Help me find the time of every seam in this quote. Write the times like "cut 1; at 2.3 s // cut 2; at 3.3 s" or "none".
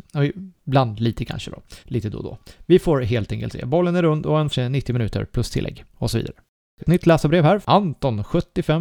cut 1; at 1.8 s // cut 2; at 4.5 s // cut 3; at 6.8 s // cut 4; at 7.6 s